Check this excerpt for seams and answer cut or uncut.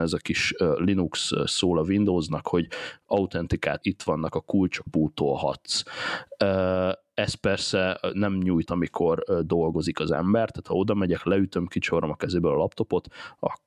cut